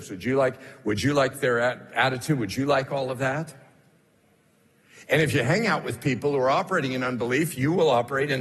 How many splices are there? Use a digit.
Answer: 0